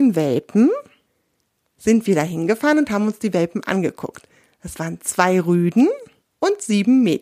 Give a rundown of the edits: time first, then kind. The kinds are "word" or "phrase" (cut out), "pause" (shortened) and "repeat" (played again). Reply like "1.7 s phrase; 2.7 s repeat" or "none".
none